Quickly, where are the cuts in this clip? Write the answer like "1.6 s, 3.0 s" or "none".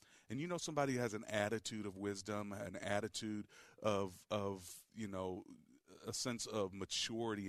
none